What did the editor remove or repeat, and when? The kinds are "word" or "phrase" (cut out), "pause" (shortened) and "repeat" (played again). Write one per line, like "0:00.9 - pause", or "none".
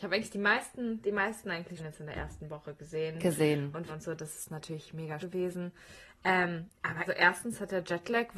0:01.8 - word
0:03.9 - word
0:05.2 - word
0:07.1 - phrase

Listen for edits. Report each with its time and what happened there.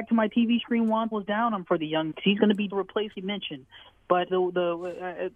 0:01.1 - word
0:01.6 - word
0:02.1 - word
0:02.7 - word
0:03.1 - word
0:04.3 - word

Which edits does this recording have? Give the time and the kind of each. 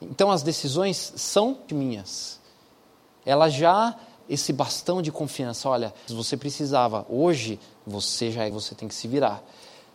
0:01.7 - word
0:04.2 - word
0:06.1 - word
0:08.5 - word

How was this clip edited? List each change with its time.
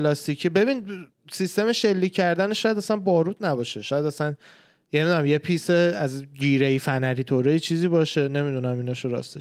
none

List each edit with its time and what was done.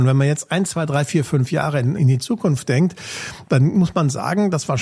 0:02.0 - word

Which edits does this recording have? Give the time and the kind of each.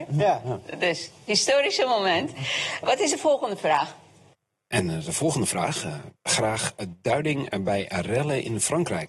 0:06.2 - pause

